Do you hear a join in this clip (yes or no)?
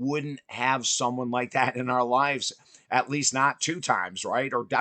no